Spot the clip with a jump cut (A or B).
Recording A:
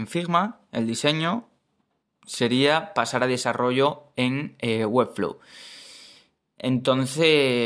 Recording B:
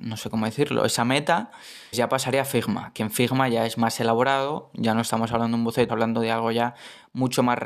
B